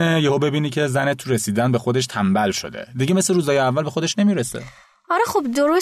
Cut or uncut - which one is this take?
uncut